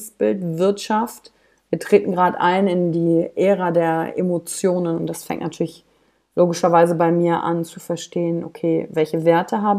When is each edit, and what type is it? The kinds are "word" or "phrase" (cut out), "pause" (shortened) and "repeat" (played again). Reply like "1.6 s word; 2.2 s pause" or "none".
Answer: none